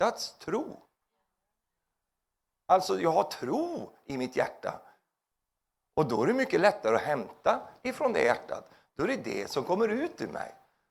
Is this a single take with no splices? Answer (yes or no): yes